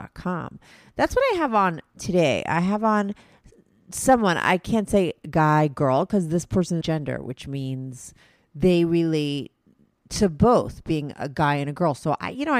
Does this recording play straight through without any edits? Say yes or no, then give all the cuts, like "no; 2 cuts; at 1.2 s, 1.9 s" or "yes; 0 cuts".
no; 1 cut; at 6.8 s